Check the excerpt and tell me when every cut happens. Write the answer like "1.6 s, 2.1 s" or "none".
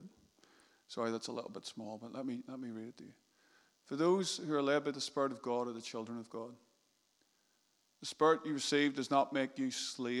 none